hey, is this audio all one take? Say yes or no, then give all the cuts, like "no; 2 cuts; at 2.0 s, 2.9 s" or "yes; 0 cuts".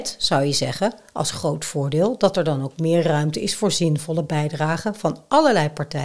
yes; 0 cuts